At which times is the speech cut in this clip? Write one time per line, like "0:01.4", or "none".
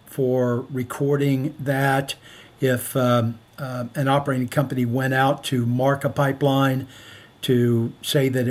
none